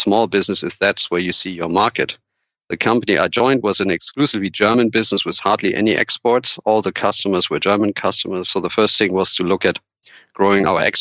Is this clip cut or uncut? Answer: uncut